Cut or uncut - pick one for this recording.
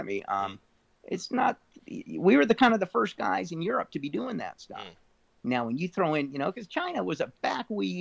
uncut